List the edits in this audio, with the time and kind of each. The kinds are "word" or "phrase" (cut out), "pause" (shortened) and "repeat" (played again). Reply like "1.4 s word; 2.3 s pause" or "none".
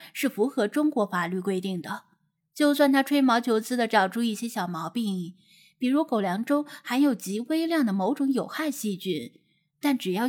none